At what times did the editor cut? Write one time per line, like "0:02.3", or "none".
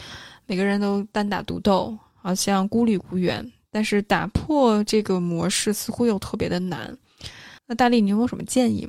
0:07.6